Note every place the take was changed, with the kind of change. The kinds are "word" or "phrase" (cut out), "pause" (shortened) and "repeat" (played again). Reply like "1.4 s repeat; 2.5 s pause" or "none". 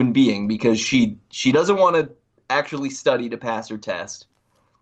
none